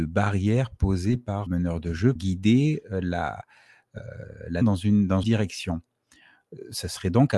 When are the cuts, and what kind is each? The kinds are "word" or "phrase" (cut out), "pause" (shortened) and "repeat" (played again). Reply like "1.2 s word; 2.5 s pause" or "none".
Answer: 1.5 s word; 2.2 s word; 4.6 s word; 5.2 s word